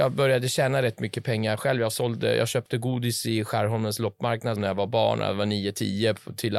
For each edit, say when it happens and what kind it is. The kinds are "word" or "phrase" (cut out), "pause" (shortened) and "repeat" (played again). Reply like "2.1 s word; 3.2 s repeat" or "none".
4.6 s phrase